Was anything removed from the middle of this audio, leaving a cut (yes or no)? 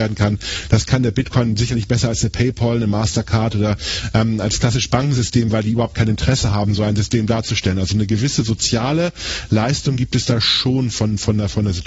no